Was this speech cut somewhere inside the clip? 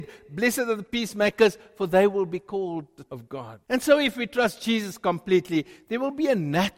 yes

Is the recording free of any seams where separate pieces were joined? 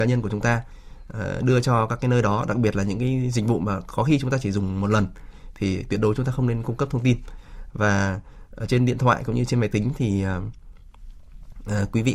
yes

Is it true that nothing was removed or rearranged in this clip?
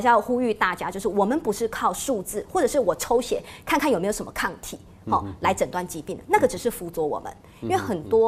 yes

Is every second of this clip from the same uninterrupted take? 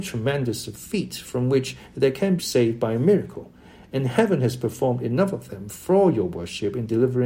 no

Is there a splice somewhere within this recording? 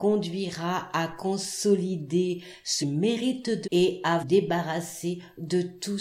yes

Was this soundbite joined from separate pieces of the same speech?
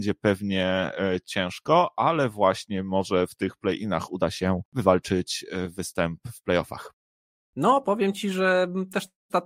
no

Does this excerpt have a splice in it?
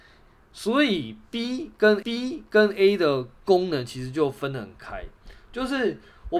yes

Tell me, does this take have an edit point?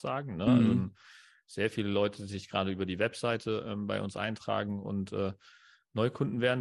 no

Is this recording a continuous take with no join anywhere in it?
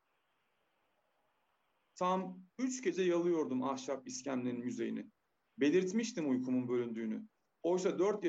yes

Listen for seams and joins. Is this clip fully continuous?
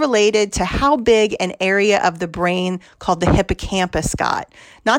yes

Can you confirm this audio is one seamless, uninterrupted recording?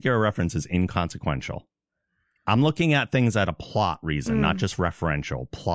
yes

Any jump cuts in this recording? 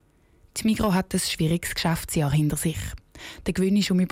no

